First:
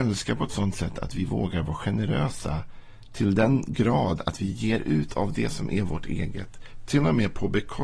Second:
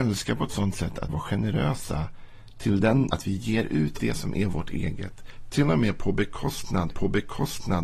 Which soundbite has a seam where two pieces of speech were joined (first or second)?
second